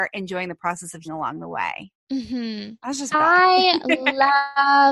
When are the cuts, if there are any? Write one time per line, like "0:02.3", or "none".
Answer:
0:01.0
0:02.0
0:03.1